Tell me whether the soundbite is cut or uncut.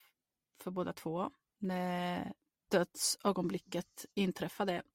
uncut